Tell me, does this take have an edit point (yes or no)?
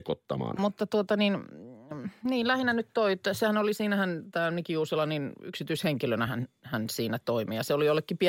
no